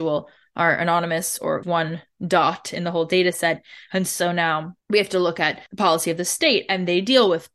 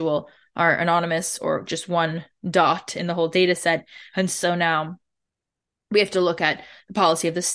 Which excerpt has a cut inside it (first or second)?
first